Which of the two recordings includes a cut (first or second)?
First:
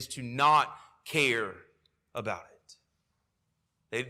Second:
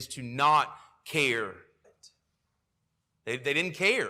second